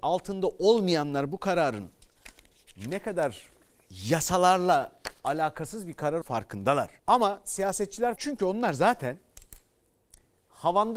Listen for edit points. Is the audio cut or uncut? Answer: cut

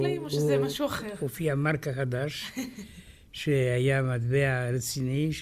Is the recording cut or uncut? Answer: uncut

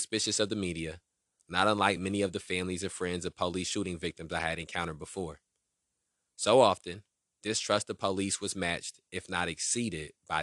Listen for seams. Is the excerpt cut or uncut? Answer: uncut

